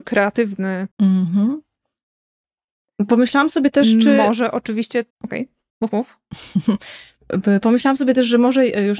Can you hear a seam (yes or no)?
yes